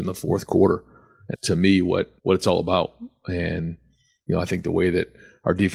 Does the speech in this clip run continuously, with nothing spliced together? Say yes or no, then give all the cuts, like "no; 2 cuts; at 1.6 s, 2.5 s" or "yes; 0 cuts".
no; 2 cuts; at 1.3 s, 2.2 s